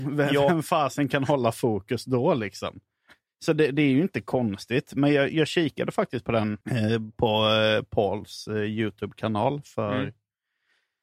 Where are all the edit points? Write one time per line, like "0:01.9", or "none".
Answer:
0:06.6